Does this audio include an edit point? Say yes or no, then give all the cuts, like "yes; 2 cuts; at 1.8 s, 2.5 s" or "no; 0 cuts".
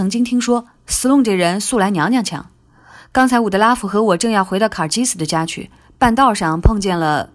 no; 0 cuts